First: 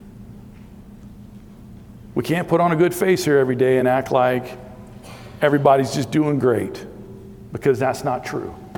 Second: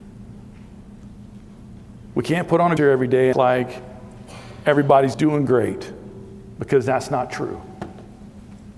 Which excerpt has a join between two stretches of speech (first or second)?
second